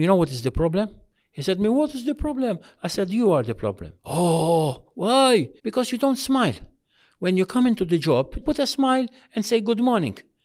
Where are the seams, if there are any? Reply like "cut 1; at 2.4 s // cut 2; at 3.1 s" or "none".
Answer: cut 1; at 4.0 s // cut 2; at 5.6 s // cut 3; at 8.4 s